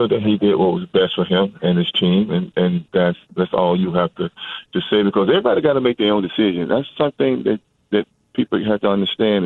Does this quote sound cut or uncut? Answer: uncut